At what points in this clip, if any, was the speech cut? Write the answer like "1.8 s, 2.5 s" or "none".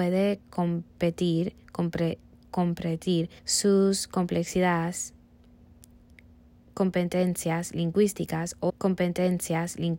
3.4 s, 8.7 s

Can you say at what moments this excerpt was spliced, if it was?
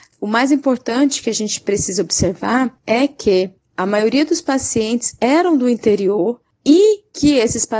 none

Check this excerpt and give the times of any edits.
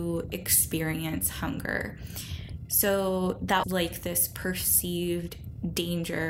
3.6 s

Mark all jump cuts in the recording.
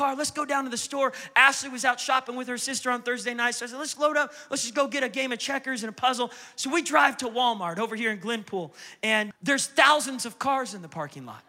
9.3 s

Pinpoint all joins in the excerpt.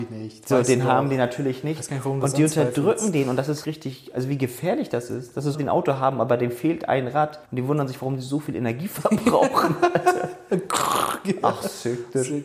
3.6 s, 5.5 s, 7.4 s

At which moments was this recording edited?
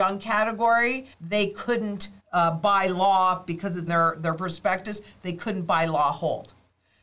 1.1 s, 2.2 s, 3.9 s

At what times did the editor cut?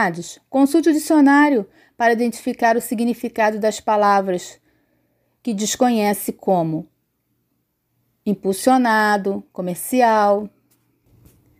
none

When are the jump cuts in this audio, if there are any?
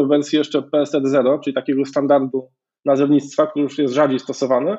none

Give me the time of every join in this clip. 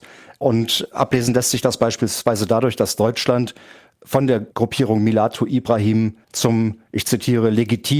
4.5 s, 6.2 s

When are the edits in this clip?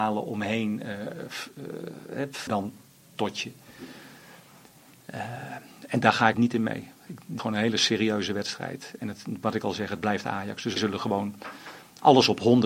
2.5 s, 6.3 s, 7.4 s, 10.8 s

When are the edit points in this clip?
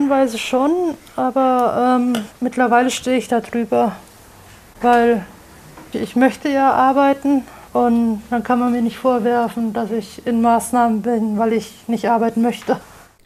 2.4 s, 5.9 s, 7.7 s

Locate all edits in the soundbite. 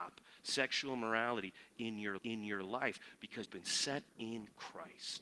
2.2 s, 3.5 s, 4.1 s

